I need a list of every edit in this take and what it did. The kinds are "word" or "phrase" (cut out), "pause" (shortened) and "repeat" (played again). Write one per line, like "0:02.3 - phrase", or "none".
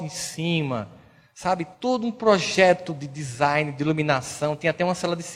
0:01.7 - pause